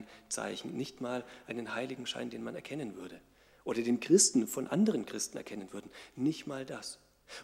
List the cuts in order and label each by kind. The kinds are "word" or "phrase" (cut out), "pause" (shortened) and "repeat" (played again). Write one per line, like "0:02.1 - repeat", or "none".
none